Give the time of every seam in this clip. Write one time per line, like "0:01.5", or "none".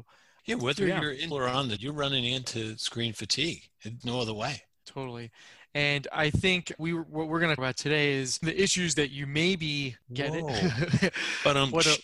0:01.3
0:01.8
0:04.0
0:04.8
0:06.8
0:07.6
0:08.4
0:10.1

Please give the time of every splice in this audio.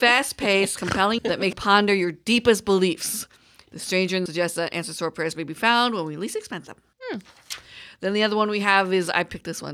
0:01.2
0:01.5
0:04.3

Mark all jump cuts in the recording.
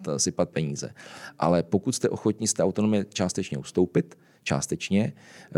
none

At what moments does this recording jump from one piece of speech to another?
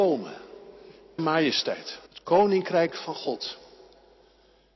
0:01.2
0:02.1

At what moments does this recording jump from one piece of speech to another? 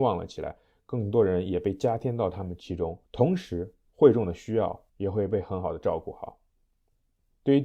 0:03.1
0:04.9

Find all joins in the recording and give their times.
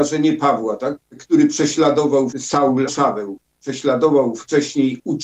0:01.1
0:02.3
0:02.9

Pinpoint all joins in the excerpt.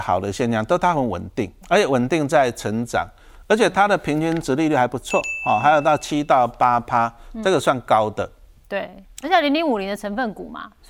0:01.6

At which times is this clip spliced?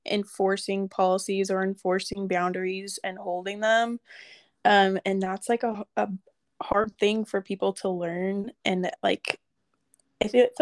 none

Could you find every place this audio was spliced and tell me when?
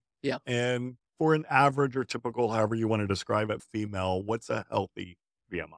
0:03.6

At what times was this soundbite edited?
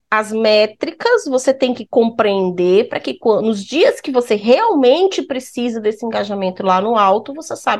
none

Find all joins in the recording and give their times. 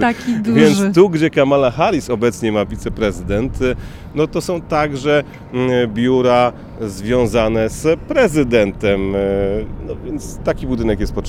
0:02.6

